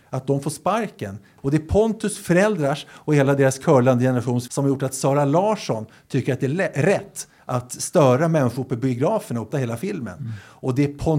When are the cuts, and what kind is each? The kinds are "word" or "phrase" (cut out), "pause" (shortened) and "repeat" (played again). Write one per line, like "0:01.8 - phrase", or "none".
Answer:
0:04.5 - word
0:09.5 - word